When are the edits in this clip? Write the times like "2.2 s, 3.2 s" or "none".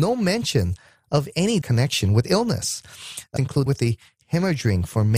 1.6 s, 2.2 s, 3.4 s, 3.7 s

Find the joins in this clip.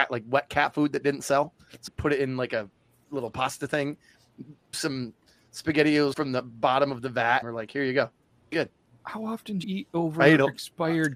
1.9 s, 3.0 s, 4.7 s, 6.1 s, 7.4 s, 8.5 s, 9.6 s

